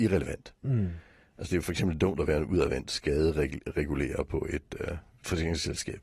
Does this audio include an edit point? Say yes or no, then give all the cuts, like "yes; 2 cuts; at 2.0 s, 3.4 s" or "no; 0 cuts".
no; 0 cuts